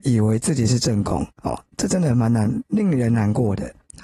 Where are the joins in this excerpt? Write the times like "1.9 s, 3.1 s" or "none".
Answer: 1.3 s